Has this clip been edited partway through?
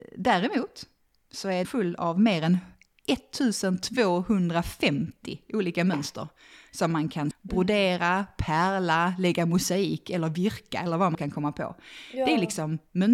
yes; 3 cuts; at 1.6 s, 7.3 s, 11.1 s

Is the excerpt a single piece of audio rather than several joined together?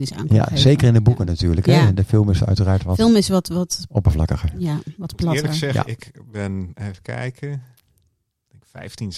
yes; 0 cuts

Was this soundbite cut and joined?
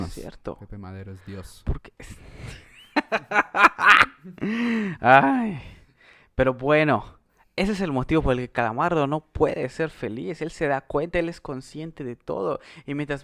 no; 0 cuts

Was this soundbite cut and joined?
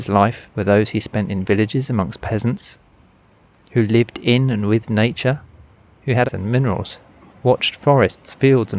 yes; 1 cut; at 6.3 s

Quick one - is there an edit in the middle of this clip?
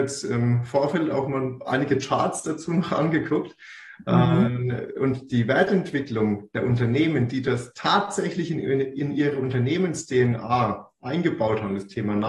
no; 0 cuts

